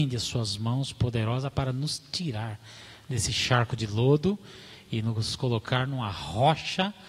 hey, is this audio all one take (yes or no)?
yes